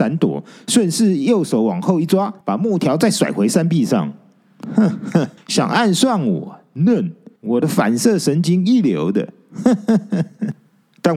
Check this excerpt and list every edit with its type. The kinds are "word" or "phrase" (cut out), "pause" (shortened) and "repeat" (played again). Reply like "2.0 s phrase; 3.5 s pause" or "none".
2.4 s pause; 5.4 s pause; 7.4 s pause